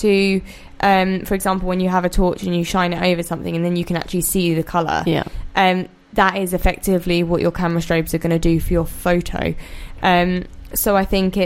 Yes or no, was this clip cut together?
no